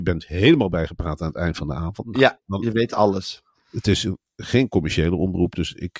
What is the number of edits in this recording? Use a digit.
0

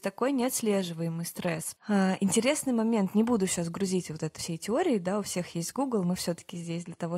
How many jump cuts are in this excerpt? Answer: 1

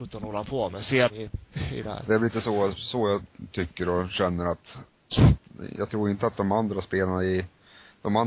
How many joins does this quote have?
1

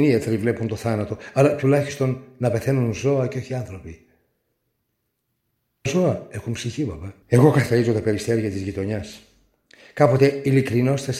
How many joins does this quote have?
3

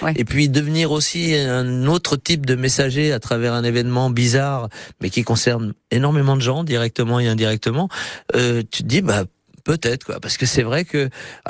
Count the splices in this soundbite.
0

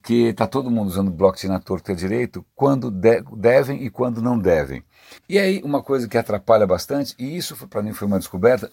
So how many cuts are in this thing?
1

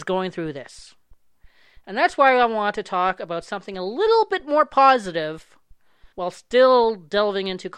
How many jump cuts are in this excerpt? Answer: 1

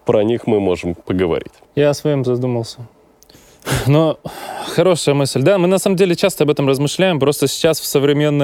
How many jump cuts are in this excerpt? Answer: 1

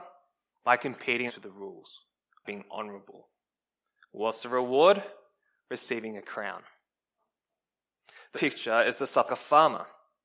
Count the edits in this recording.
4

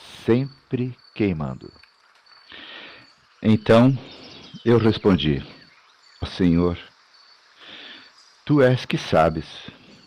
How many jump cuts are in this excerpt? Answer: 1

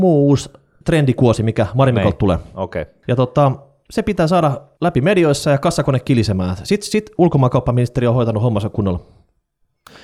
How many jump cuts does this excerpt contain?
0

